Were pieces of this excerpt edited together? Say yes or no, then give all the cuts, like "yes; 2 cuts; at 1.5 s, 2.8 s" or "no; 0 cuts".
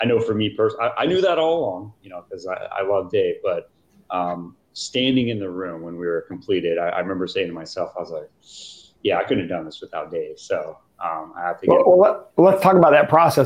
no; 0 cuts